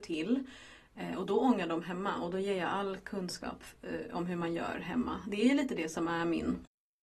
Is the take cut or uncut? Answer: cut